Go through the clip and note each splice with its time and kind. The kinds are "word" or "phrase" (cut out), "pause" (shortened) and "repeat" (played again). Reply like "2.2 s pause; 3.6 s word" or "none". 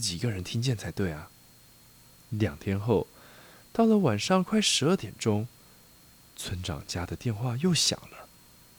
none

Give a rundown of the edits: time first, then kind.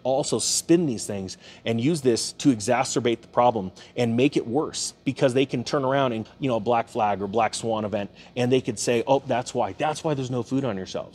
6.3 s word

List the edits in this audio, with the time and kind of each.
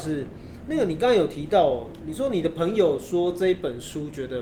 none

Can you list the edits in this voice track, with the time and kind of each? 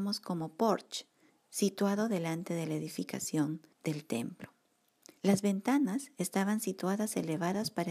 1.3 s pause; 3.7 s pause; 5.2 s pause

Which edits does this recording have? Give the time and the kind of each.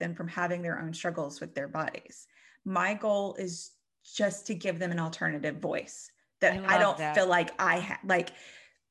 none

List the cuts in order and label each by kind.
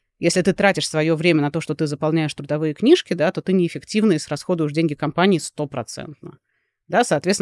none

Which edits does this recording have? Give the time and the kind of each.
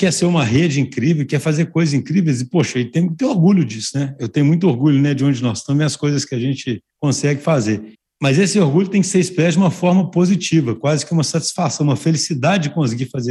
6.9 s pause; 7.9 s pause

